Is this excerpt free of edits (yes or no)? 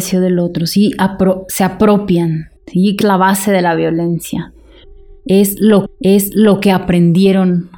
no